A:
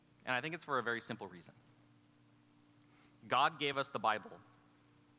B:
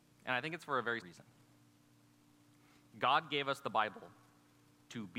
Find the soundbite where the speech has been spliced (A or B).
B